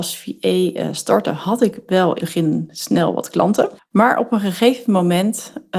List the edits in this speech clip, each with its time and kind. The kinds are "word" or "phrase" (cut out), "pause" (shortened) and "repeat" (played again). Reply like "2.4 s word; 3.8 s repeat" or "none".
2.2 s word; 3.8 s pause